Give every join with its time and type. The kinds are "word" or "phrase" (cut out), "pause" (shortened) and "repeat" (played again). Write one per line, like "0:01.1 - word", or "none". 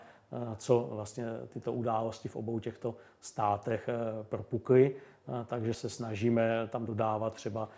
0:05.7 - word